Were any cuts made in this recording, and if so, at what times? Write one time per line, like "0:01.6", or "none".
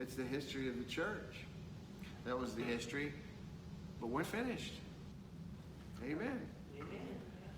0:02.6
0:04.2